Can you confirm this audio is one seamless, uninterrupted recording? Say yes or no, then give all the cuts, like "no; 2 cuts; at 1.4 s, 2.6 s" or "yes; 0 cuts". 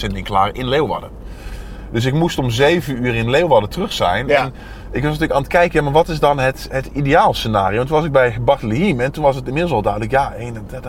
yes; 0 cuts